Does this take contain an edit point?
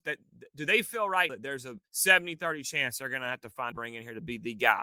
yes; 3 cuts; at 1.3 s, 1.9 s, 3.7 s

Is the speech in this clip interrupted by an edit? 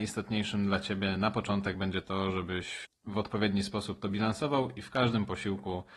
no; 0 cuts

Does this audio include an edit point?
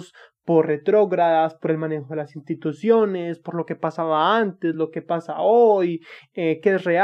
no; 0 cuts

